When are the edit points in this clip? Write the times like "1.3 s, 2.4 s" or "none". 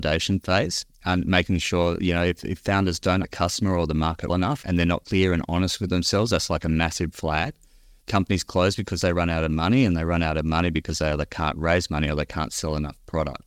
3.2 s, 4.3 s, 7.1 s